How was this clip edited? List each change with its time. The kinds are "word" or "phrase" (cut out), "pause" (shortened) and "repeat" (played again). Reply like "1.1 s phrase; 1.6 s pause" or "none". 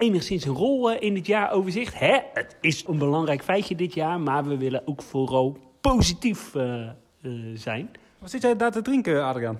2.9 s phrase